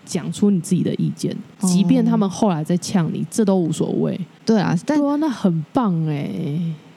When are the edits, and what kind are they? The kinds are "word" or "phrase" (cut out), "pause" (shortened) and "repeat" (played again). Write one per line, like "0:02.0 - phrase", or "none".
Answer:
0:04.8 - phrase